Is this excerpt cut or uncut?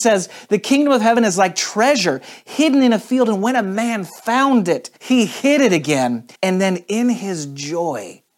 cut